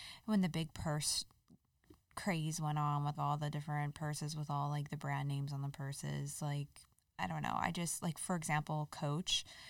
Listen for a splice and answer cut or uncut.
cut